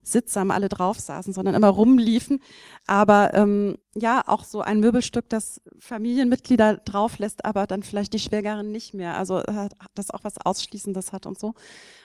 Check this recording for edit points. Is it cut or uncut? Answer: cut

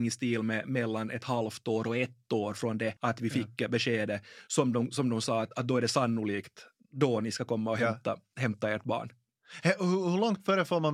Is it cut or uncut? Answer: cut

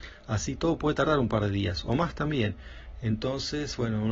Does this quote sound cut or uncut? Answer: uncut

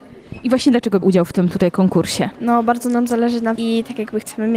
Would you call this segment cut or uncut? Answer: cut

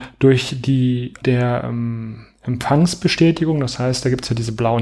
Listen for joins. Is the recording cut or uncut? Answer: cut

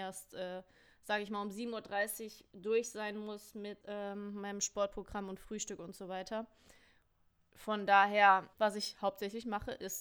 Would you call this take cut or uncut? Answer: cut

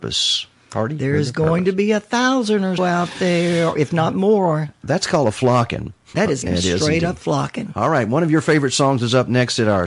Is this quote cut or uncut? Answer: cut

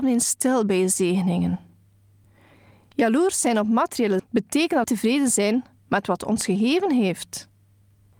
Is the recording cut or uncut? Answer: cut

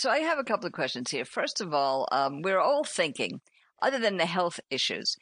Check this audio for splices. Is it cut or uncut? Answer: uncut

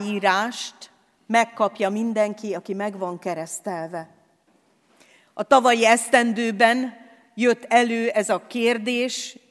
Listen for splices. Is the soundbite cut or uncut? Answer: uncut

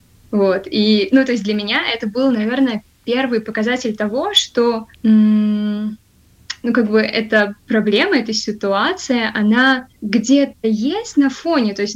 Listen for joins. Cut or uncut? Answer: cut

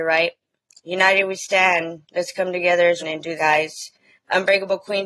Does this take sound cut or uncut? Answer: cut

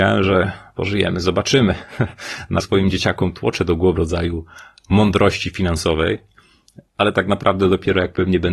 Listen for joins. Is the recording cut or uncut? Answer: cut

